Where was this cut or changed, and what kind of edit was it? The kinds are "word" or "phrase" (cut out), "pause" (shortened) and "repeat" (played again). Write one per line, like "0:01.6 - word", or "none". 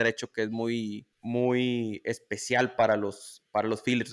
0:01.1 - pause